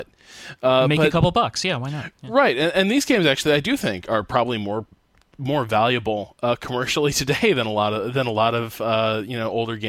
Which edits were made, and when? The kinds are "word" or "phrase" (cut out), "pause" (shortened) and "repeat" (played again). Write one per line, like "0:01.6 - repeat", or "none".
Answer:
none